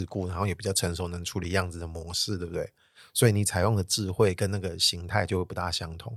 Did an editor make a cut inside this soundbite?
no; 0 cuts

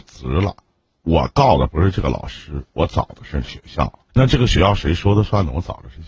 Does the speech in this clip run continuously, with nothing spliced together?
no; 1 cut; at 4.1 s

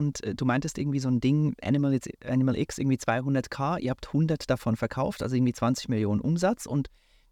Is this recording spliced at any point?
no; 0 cuts

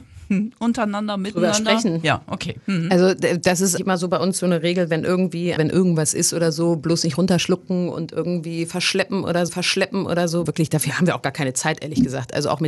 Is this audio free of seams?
no; 4 cuts; at 3.8 s, 5.6 s, 9.5 s, 10.5 s

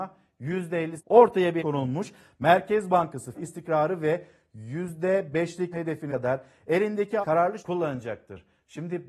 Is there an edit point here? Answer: yes; 7 cuts; at 1.0 s, 1.6 s, 3.3 s, 5.7 s, 6.1 s, 7.2 s, 7.6 s

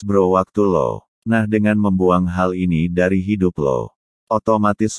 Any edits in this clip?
no; 0 cuts

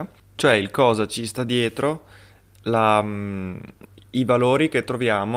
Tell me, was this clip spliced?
no; 0 cuts

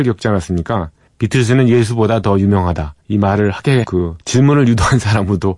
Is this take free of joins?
no; 4 cuts; at 1.1 s, 3.0 s, 3.8 s, 4.2 s

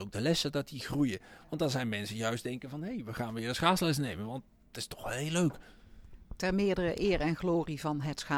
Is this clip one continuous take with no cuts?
yes; 0 cuts

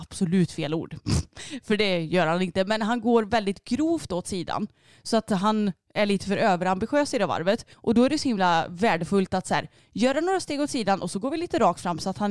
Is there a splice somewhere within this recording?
yes; 1 cut; at 7.7 s

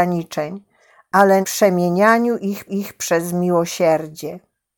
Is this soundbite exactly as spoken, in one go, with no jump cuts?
no; 2 cuts; at 1.4 s, 2.7 s

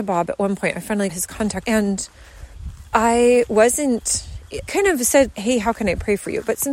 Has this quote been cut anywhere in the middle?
yes; 4 cuts; at 1.1 s, 1.6 s, 4.7 s, 5.3 s

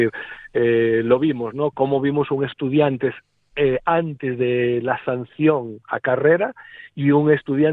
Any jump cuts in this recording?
no; 0 cuts

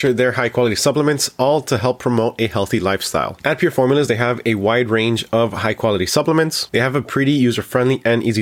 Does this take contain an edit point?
no; 0 cuts

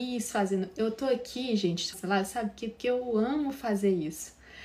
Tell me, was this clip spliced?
yes; 1 cut; at 1.9 s

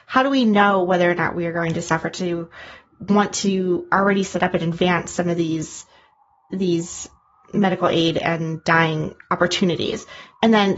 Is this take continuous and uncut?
yes; 0 cuts

